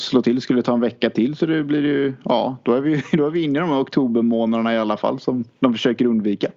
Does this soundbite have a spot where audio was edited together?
no; 0 cuts

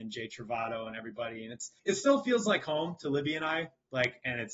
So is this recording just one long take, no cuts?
no; 1 cut; at 1.8 s

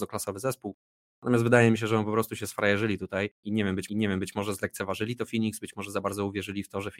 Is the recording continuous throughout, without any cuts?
no; 2 cuts; at 3.3 s, 3.9 s

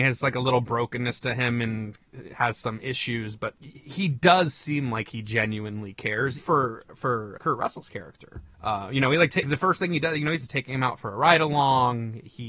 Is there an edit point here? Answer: yes; 4 cuts; at 6.4 s, 7.4 s, 8.5 s, 9.4 s

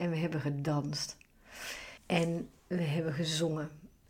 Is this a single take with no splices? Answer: no; 1 cut; at 2.0 s

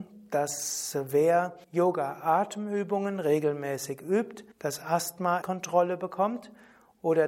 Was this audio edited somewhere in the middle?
yes; 3 cuts; at 1.6 s, 4.5 s, 5.4 s

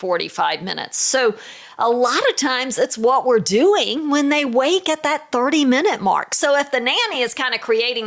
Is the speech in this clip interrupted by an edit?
no; 0 cuts

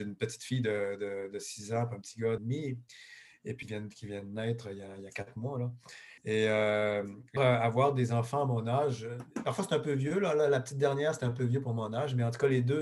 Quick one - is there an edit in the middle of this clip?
yes; 4 cuts; at 2.4 s, 3.6 s, 6.2 s, 7.4 s

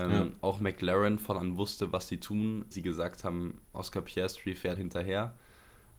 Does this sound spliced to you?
yes; 4 cuts; at 1.4 s, 2.7 s, 3.6 s, 4.8 s

